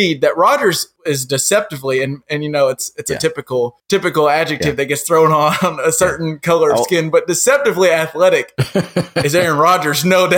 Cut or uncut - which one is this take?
uncut